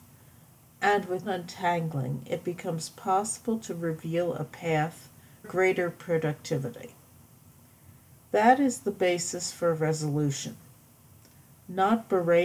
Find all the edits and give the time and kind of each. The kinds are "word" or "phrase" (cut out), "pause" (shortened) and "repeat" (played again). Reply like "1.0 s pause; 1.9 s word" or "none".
1.2 s word; 5.4 s word